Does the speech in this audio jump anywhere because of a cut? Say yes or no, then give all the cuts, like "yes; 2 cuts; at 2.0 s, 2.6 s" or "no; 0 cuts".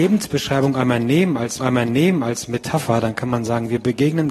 yes; 1 cut; at 1.6 s